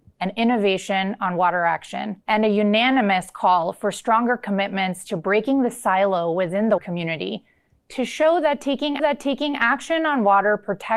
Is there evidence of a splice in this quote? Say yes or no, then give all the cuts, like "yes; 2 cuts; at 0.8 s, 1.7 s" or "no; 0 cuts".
yes; 3 cuts; at 2.2 s, 6.8 s, 9.0 s